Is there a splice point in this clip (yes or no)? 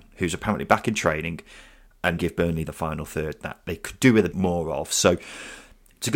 yes